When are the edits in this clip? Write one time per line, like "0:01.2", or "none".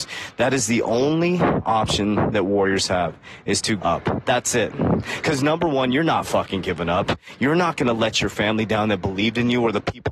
0:03.8

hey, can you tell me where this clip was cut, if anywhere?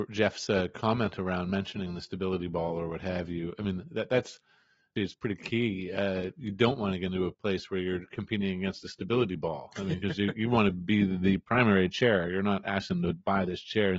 0:05.0
0:07.3

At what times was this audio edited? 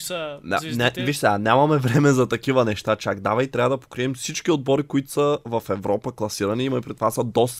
none

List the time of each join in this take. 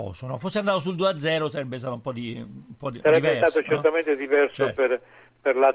0:03.0

